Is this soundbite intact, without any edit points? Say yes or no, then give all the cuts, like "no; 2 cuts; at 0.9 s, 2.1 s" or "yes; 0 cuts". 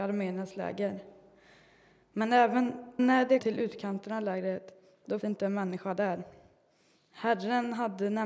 no; 3 cuts; at 3.0 s, 3.4 s, 5.2 s